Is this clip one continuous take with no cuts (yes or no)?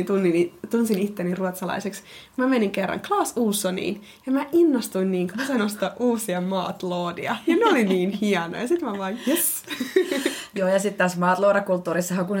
yes